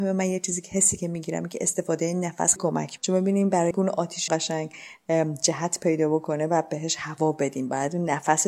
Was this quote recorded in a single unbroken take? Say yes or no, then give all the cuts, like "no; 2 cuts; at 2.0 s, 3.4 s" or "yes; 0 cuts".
no; 4 cuts; at 2.6 s, 3.0 s, 3.7 s, 4.3 s